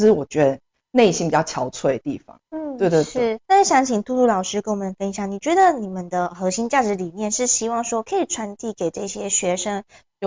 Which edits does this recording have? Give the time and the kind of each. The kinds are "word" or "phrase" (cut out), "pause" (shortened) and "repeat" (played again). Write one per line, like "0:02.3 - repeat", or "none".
0:03.4 - pause